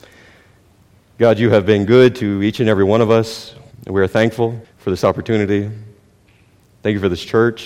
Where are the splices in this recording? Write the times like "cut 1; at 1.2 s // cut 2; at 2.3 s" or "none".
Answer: cut 1; at 3.7 s // cut 2; at 4.6 s

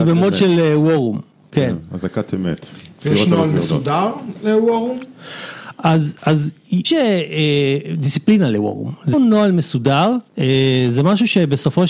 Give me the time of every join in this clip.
cut 1; at 6.8 s // cut 2; at 9.1 s // cut 3; at 10.3 s

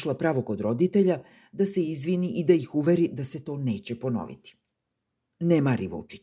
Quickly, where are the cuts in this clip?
none

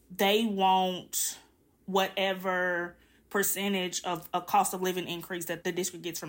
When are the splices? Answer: none

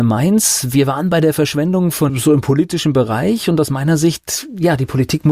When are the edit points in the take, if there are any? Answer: cut 1; at 2.1 s

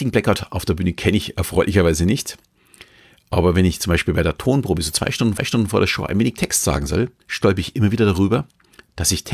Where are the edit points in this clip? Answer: cut 1; at 5.4 s // cut 2; at 7.2 s

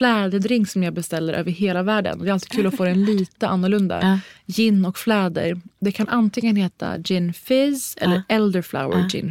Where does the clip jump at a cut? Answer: none

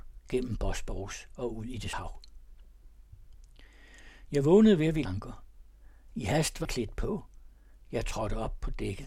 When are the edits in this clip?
cut 1; at 1.9 s // cut 2; at 5.0 s // cut 3; at 6.6 s

